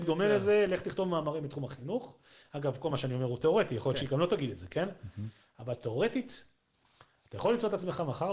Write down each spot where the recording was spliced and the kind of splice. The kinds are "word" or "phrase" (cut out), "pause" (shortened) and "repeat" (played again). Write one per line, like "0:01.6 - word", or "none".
none